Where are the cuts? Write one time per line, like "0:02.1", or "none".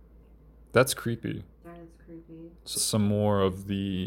0:01.5
0:02.7